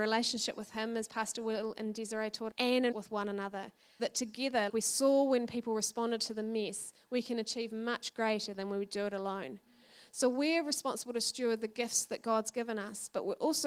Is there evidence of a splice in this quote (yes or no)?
yes